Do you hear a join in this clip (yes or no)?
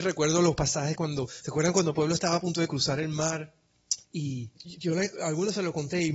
yes